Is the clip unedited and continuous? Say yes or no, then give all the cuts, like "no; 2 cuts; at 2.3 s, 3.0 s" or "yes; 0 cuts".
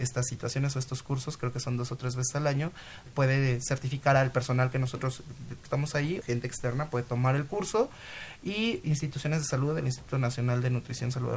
no; 4 cuts; at 3.1 s, 5.6 s, 6.2 s, 8.8 s